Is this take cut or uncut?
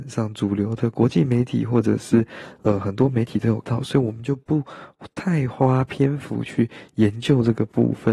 cut